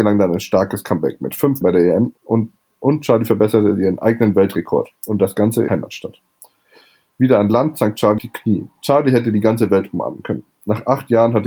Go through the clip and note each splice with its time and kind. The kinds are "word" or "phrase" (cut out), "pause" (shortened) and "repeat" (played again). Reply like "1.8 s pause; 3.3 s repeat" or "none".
1.6 s word; 2.2 s pause; 5.7 s word; 8.2 s word

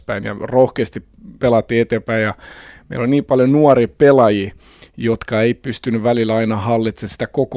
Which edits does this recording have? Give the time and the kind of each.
none

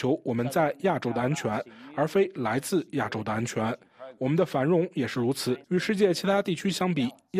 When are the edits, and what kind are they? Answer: 5.6 s pause

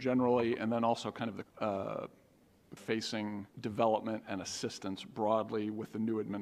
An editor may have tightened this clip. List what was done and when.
1.4 s word; 2.8 s phrase; 3.5 s pause

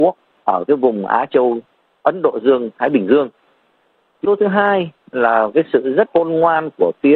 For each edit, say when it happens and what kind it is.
4.2 s word; 6.1 s word

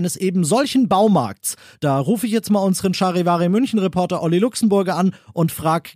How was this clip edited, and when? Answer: none

